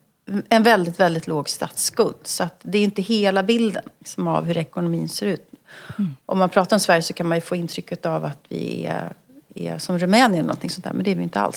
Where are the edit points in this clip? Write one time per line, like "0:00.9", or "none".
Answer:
none